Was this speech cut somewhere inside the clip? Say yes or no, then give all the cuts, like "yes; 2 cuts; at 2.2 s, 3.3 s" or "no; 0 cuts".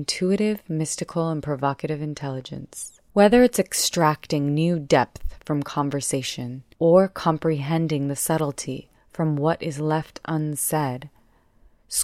yes; 3 cuts; at 3.1 s, 6.7 s, 9.0 s